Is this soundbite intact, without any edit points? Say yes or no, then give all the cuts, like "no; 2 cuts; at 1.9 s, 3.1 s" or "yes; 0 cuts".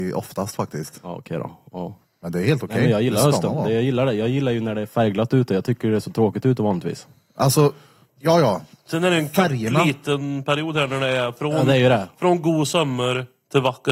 yes; 0 cuts